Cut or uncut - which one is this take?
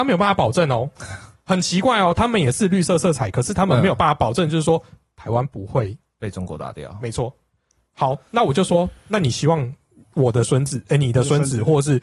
uncut